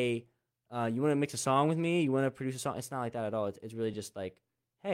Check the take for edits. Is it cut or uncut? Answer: uncut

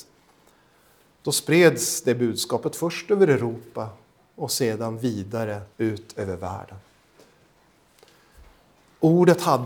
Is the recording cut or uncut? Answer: cut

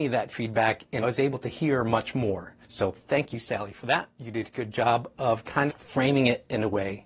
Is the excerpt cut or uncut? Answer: cut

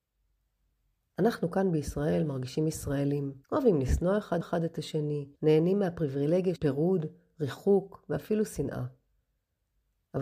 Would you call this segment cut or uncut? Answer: cut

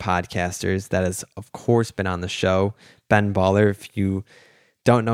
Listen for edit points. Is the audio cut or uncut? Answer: uncut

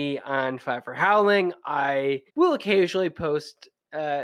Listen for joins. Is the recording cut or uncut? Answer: cut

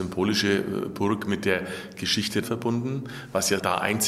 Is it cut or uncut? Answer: cut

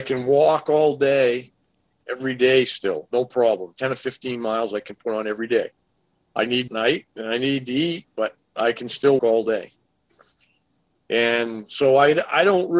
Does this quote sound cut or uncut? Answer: cut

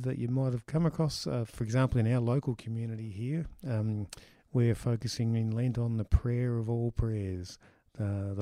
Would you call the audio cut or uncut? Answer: uncut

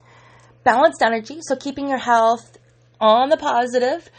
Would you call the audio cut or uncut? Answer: uncut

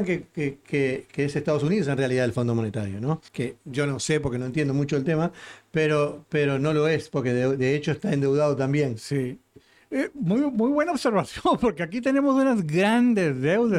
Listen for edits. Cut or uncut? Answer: cut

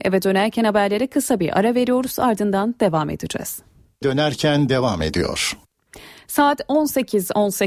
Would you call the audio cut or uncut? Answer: cut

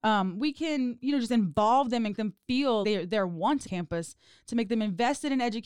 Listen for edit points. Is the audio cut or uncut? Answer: cut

